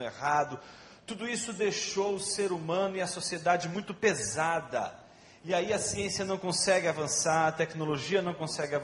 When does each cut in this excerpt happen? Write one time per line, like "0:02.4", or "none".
none